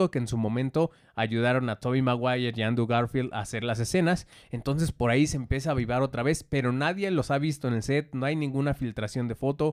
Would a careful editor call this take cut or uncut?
uncut